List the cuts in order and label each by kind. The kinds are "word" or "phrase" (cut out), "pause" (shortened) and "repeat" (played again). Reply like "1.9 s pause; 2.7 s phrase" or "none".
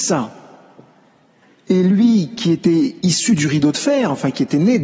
none